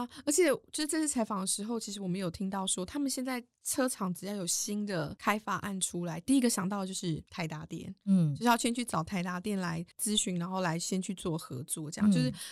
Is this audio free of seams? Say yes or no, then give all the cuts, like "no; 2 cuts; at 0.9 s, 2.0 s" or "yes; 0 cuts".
no; 2 cuts; at 7.3 s, 9.9 s